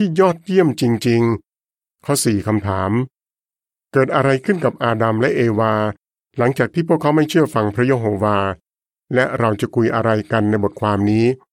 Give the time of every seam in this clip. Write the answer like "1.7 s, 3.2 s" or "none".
2.0 s